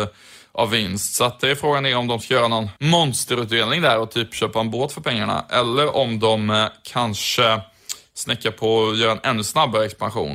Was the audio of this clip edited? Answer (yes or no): yes